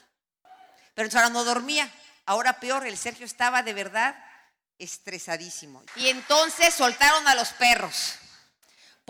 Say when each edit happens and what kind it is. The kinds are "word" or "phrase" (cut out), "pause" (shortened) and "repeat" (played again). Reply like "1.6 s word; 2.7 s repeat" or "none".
none

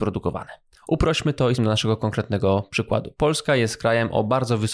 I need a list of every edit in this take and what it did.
1.6 s word

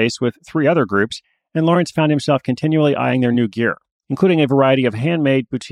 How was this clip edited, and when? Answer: none

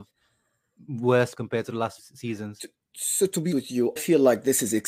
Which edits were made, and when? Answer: 1.3 s word; 2.0 s word; 3.5 s word; 4.0 s word

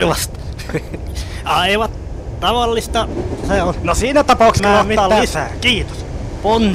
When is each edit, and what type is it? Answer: 3.4 s word; 4.6 s word

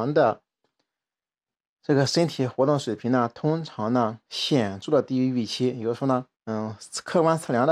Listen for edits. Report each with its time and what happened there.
4.2 s pause; 6.3 s pause

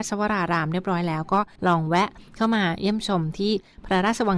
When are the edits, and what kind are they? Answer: 1.6 s pause

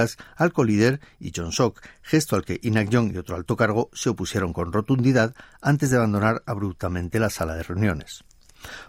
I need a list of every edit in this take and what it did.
none

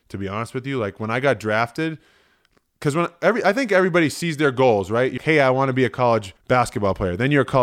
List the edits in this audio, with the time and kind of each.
5.2 s word; 6.4 s pause

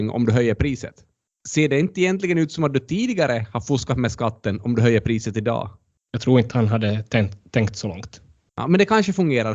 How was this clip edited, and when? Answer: none

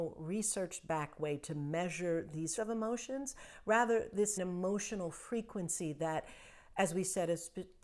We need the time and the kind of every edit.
2.6 s word; 4.4 s phrase

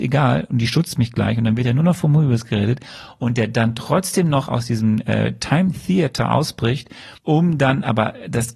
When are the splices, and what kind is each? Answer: 7.2 s pause

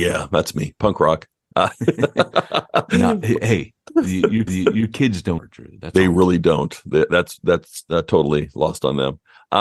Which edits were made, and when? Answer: 4.5 s repeat; 5.4 s phrase

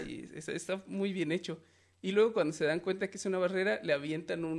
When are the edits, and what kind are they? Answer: none

